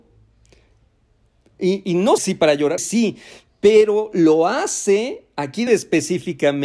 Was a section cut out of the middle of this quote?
yes; 3 cuts; at 2.2 s, 2.8 s, 5.7 s

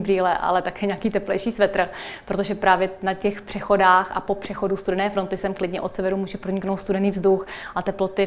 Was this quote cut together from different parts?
no; 0 cuts

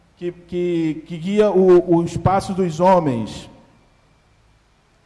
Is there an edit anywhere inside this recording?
no; 0 cuts

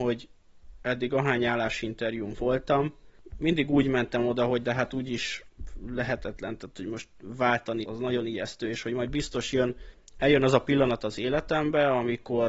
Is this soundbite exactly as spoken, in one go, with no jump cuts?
no; 1 cut; at 7.8 s

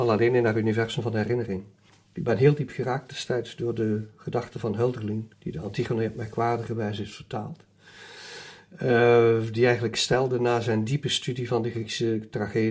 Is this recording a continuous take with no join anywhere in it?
no; 2 cuts; at 1.9 s, 5.3 s

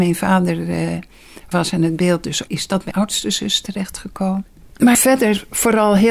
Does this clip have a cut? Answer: yes; 4 cuts; at 1.5 s, 2.5 s, 2.9 s, 4.9 s

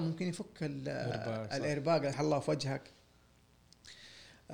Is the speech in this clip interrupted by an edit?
yes; 1 cut; at 2.1 s

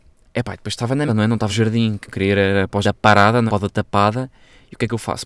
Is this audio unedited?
no; 5 cuts; at 1.1 s, 1.5 s, 2.1 s, 2.8 s, 3.5 s

